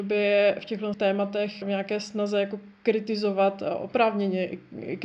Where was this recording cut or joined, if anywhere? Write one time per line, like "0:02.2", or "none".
0:00.9
0:01.6

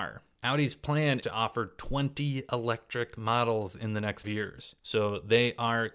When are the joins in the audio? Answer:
0:01.2
0:04.2

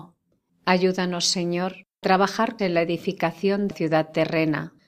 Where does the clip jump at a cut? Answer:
0:02.0
0:02.6
0:03.7

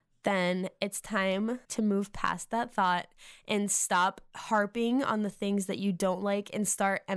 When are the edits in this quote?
0:01.6

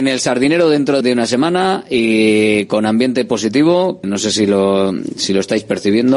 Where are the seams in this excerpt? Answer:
0:01.0
0:04.0

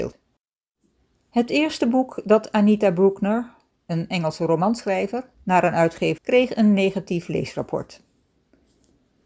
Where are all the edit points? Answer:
0:05.3
0:06.2

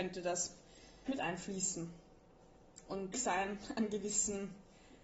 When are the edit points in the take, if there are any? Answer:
0:01.1
0:03.1

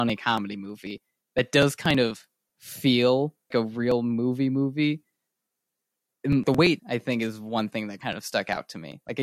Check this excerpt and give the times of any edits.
0:03.5
0:06.4
0:06.8

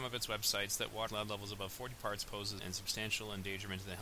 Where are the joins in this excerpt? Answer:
0:01.1
0:02.3
0:02.6

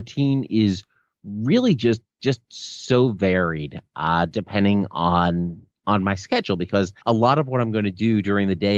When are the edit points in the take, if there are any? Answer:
0:07.0

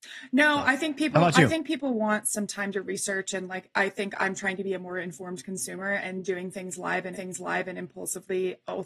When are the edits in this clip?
0:07.1

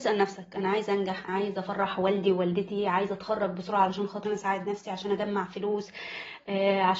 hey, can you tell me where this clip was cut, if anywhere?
0:01.3
0:04.2

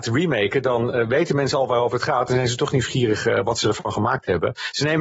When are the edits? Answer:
none

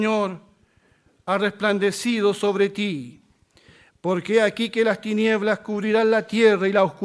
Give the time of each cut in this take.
none

